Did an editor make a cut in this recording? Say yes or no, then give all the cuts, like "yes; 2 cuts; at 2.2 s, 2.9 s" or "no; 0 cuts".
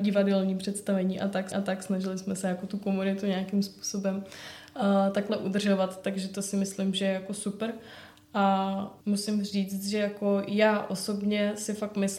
yes; 2 cuts; at 1.5 s, 9.0 s